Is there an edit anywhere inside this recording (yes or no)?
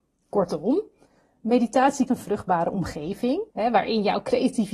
yes